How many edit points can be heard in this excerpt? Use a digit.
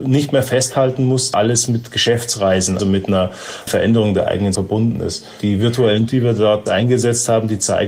6